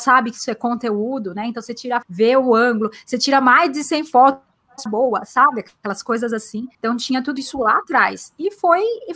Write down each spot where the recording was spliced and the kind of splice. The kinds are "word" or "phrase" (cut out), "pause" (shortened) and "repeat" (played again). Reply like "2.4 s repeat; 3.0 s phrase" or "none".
2.0 s word; 4.9 s phrase; 6.7 s pause; 7.4 s word